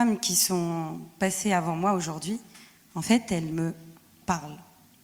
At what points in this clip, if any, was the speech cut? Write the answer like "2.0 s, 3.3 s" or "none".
none